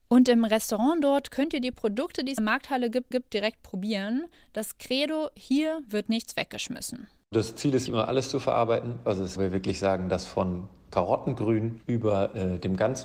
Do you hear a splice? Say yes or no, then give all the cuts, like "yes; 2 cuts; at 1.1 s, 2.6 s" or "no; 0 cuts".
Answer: yes; 4 cuts; at 2.4 s, 3.1 s, 7.9 s, 9.4 s